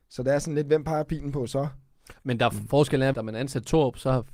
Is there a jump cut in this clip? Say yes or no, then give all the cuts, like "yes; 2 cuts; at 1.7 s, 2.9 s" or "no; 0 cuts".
yes; 1 cut; at 3.1 s